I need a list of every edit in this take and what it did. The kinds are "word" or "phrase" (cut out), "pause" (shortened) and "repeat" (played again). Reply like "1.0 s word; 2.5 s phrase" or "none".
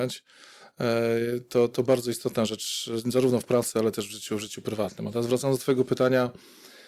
1.7 s word